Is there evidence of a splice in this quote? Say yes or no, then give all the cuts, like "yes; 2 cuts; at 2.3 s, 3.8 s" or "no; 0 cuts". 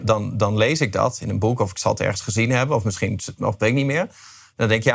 yes; 1 cut; at 3.6 s